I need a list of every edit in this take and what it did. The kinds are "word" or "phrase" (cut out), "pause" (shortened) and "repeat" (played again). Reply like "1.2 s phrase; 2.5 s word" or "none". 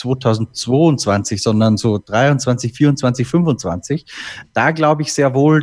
4.4 s word